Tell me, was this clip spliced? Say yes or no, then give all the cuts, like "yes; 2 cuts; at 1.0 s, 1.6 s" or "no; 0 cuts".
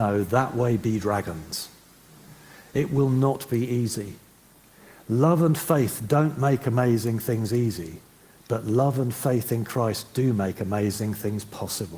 no; 0 cuts